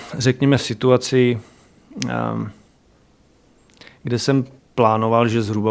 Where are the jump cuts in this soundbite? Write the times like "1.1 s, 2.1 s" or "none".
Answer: none